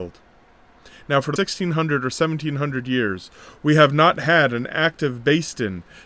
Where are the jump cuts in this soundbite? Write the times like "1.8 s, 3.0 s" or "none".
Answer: 1.4 s